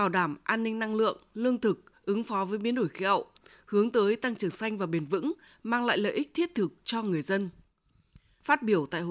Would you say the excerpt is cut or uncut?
uncut